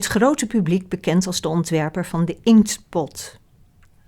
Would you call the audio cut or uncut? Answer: uncut